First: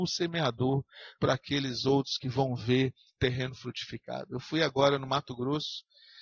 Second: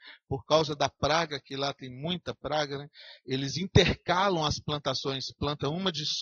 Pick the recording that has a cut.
first; 2 cuts; at 1.2 s, 3.2 s

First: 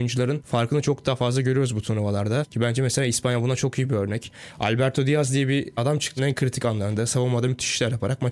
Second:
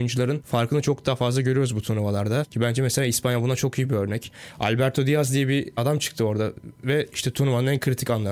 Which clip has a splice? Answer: first; 1 cut; at 6.2 s

